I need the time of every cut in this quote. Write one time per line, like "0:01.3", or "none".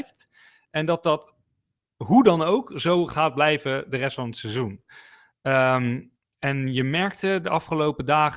none